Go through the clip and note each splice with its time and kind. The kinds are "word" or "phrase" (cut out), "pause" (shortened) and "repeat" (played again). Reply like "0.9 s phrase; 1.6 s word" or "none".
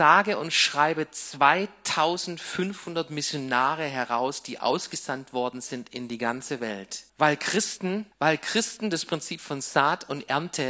7.1 s pause; 8.1 s pause